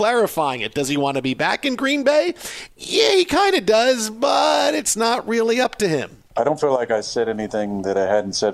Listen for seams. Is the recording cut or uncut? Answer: cut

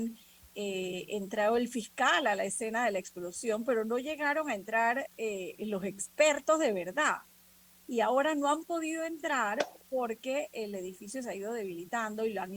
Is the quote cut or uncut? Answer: uncut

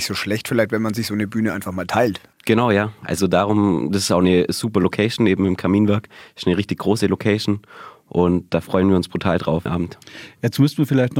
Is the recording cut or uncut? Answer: cut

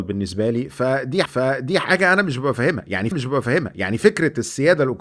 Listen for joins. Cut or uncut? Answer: cut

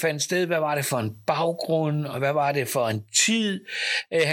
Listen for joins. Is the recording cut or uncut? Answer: uncut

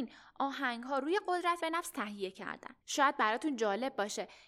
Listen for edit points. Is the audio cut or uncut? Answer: cut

